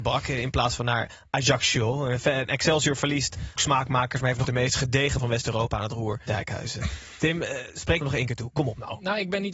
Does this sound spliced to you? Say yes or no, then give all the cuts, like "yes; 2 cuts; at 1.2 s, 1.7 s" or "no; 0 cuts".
yes; 5 cuts; at 3.6 s, 4.4 s, 5.2 s, 6.3 s, 8.0 s